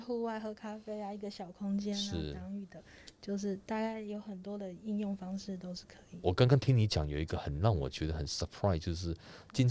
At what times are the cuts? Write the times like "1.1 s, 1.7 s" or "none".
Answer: none